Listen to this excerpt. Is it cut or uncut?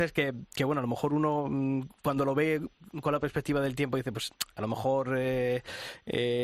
uncut